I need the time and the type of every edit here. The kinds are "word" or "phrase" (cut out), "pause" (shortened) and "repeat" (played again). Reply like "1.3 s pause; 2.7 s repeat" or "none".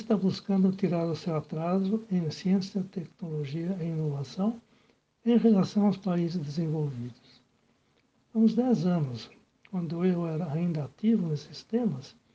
none